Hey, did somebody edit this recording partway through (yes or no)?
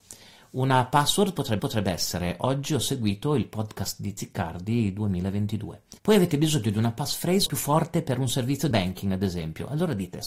yes